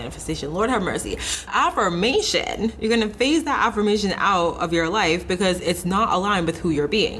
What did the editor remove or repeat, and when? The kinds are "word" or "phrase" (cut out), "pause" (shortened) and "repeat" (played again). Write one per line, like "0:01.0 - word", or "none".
0:01.5 - word